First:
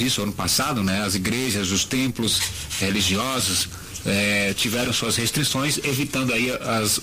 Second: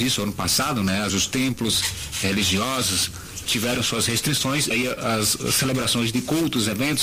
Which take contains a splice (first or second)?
second